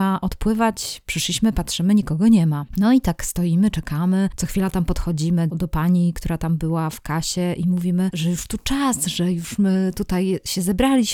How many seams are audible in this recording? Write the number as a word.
two